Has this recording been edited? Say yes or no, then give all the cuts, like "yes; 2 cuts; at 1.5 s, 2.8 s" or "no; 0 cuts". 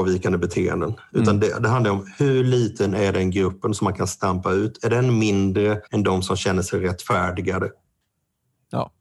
yes; 1 cut; at 5.9 s